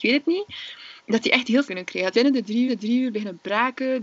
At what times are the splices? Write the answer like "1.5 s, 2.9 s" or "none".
1.0 s, 1.7 s, 2.1 s, 2.7 s